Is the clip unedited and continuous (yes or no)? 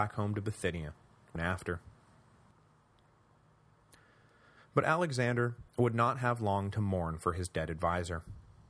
no